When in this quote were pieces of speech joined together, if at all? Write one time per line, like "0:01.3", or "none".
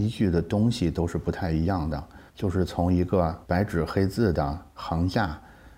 0:02.3
0:03.4